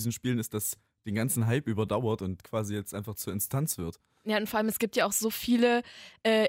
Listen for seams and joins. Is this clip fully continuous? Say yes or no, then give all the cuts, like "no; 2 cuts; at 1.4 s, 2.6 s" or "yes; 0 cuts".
yes; 0 cuts